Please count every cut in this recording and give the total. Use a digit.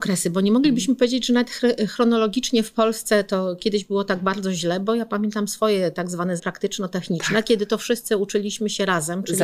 1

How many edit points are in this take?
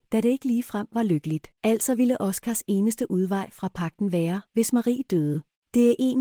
2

